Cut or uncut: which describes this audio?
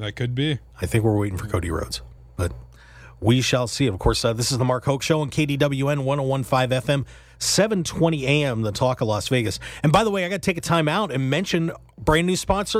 uncut